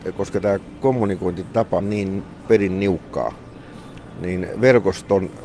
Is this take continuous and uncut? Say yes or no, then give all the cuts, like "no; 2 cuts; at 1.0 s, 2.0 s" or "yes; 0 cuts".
no; 1 cut; at 1.8 s